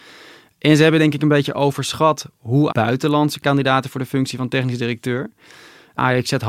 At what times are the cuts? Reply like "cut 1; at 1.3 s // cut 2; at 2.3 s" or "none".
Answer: cut 1; at 2.7 s